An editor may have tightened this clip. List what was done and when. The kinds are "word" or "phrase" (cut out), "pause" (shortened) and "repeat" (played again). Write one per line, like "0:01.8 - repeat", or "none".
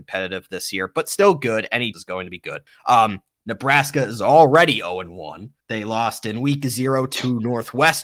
0:01.9 - phrase
0:02.7 - pause
0:05.6 - pause